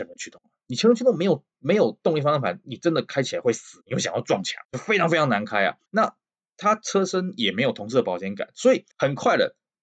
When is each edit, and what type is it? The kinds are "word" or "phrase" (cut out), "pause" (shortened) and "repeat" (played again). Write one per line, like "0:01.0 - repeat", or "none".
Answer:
0:04.6 - pause
0:05.9 - pause
0:08.9 - pause